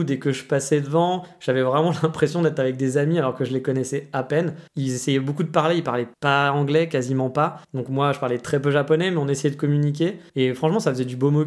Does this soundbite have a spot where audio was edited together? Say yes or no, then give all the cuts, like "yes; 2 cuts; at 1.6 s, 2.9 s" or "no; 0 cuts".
yes; 4 cuts; at 4.7 s, 6.1 s, 7.6 s, 10.3 s